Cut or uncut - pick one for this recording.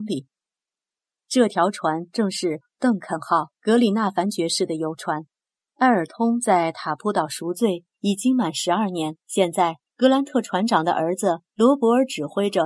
cut